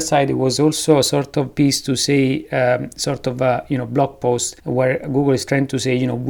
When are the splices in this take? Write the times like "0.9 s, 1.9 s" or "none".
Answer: 4.6 s